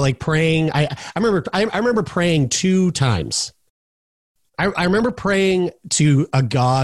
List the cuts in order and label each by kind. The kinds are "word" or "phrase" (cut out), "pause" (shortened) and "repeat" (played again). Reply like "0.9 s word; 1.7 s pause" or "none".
none